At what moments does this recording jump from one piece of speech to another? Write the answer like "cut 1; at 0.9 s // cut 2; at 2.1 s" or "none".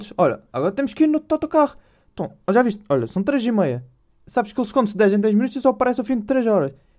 none